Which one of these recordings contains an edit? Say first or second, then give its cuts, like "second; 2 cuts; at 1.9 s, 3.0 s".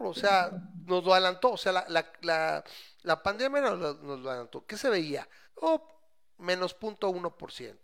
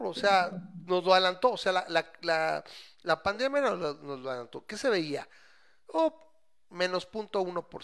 first; 1 cut; at 5.4 s